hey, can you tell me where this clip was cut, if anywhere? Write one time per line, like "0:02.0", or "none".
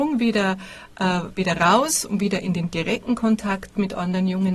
none